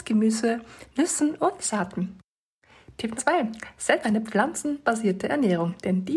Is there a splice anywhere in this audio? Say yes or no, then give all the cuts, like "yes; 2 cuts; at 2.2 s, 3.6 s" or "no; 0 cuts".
yes; 2 cuts; at 3.2 s, 4.0 s